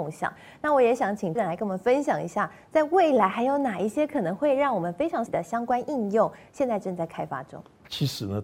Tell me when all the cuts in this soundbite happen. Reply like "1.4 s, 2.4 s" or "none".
1.3 s, 5.3 s